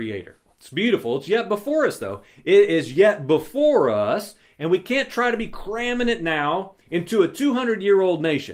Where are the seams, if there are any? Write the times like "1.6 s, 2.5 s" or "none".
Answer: 6.8 s